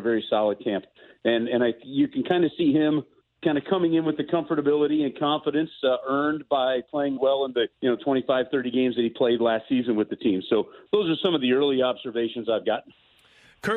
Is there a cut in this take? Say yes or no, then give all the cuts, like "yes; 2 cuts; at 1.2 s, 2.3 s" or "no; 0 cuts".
yes; 3 cuts; at 3.2 s, 7.2 s, 7.7 s